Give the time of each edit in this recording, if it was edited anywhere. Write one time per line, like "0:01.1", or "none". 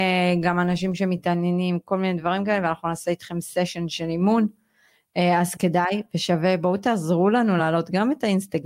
none